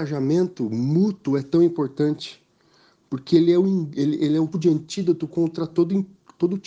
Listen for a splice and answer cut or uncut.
cut